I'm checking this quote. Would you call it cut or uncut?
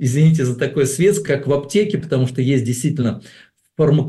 cut